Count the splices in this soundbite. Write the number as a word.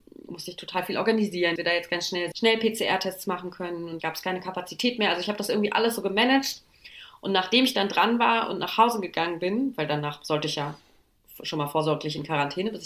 three